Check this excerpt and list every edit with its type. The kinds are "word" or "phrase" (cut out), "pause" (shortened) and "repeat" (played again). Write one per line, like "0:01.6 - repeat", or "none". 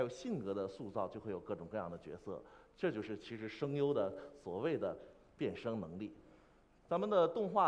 none